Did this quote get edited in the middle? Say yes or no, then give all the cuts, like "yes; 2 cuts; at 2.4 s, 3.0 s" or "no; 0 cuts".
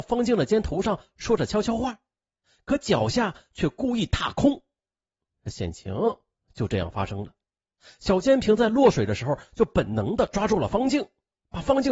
no; 0 cuts